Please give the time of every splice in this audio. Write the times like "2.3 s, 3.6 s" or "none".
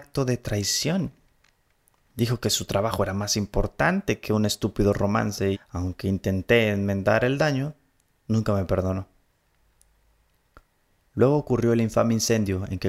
5.5 s